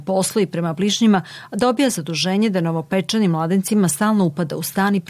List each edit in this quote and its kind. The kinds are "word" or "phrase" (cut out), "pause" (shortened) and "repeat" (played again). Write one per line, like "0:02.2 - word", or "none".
none